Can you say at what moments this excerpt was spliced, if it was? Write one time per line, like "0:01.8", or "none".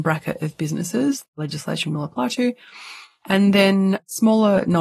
0:01.2